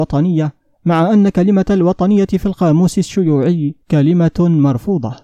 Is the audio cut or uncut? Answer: cut